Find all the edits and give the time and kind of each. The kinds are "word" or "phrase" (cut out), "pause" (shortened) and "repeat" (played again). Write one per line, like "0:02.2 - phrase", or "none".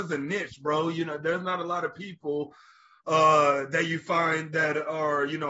none